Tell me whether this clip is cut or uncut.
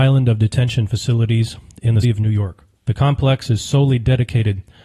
cut